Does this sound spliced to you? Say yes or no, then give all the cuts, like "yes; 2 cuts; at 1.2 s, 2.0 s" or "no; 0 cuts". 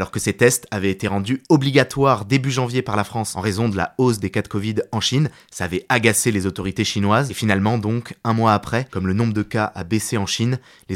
no; 0 cuts